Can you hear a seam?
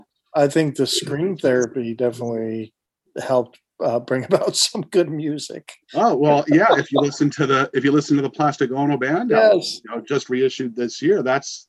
no; 0 cuts

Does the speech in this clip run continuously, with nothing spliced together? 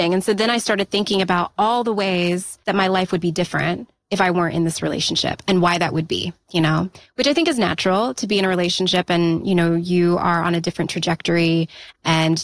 yes; 0 cuts

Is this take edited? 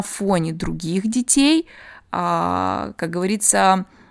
no; 0 cuts

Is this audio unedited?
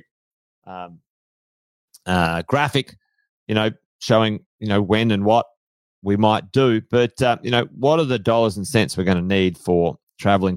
yes; 0 cuts

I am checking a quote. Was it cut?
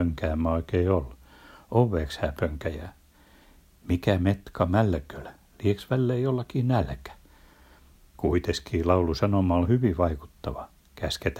no; 0 cuts

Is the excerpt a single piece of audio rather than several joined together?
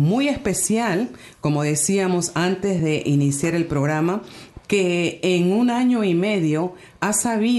yes; 0 cuts

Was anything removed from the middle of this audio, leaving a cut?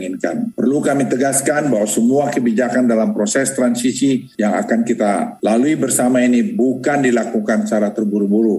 no; 0 cuts

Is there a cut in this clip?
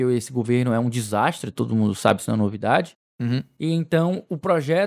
no; 0 cuts

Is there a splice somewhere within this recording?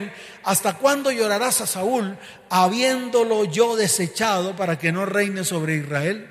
no; 0 cuts

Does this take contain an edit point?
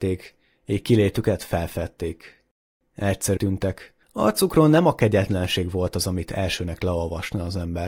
yes; 2 cuts; at 3.4 s, 4.0 s

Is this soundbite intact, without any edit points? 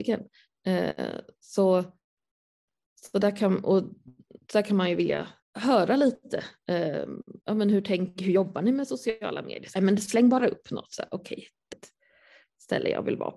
no; 4 cuts; at 5.4 s, 7.4 s, 9.8 s, 11.7 s

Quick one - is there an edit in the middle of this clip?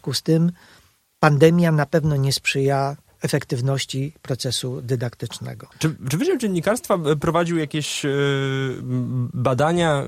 yes; 1 cut; at 5.7 s

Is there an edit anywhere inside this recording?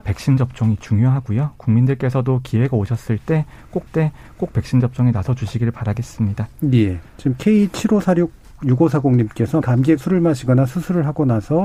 yes; 4 cuts; at 3.9 s, 7.1 s, 9.6 s, 10.0 s

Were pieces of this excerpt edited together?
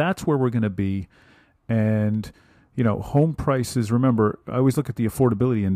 no; 0 cuts

